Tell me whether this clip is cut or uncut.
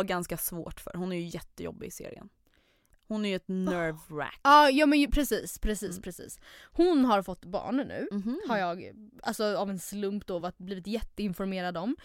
uncut